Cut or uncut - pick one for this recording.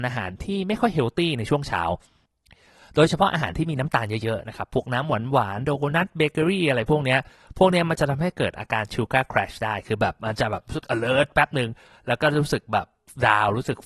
uncut